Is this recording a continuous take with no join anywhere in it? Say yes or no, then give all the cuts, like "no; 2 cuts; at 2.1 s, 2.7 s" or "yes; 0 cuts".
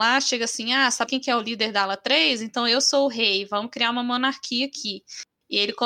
no; 1 cut; at 1.1 s